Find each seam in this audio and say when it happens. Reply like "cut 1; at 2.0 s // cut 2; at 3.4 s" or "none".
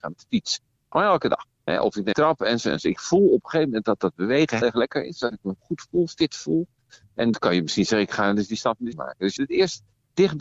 cut 1; at 2.1 s // cut 2; at 3.0 s // cut 3; at 4.6 s // cut 4; at 7.3 s // cut 5; at 8.9 s // cut 6; at 9.4 s